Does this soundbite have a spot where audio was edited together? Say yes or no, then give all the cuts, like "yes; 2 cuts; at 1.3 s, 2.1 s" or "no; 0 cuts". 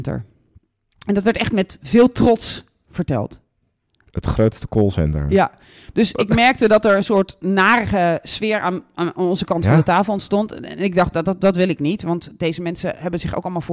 no; 0 cuts